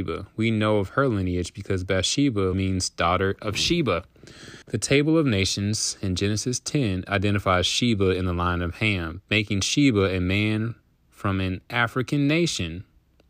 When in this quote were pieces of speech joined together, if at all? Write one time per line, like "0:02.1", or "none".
0:02.5
0:04.6
0:10.8